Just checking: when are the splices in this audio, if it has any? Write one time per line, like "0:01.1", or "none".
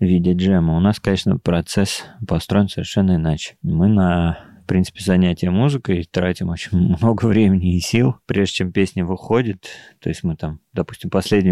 none